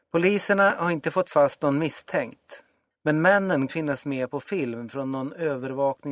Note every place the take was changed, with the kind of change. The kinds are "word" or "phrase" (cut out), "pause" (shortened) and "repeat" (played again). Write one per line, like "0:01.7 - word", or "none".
0:02.9 - pause
0:03.7 - word